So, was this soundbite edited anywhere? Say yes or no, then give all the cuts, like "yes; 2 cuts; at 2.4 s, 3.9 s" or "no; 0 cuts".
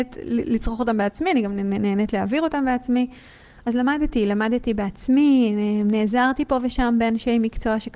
no; 0 cuts